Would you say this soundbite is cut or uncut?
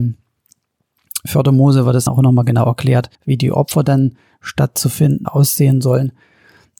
cut